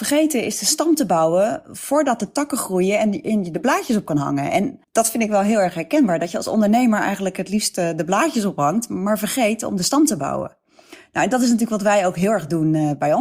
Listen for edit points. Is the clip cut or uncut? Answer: cut